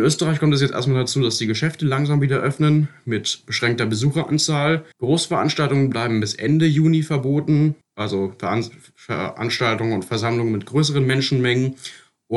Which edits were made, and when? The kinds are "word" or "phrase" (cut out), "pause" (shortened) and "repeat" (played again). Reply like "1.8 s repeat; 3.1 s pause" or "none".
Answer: 4.9 s pause; 7.8 s pause